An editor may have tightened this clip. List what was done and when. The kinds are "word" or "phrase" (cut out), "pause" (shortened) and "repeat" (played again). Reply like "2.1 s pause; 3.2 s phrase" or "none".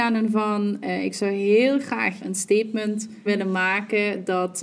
2.2 s word; 3.3 s word